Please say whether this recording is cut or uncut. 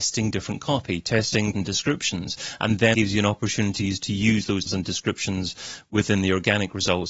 cut